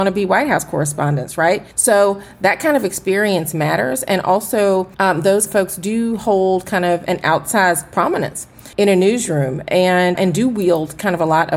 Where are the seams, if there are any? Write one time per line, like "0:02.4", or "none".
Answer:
0:01.7
0:04.9
0:05.5
0:07.1
0:08.7
0:10.2